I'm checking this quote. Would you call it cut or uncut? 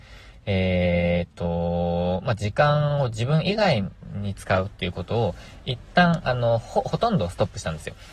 uncut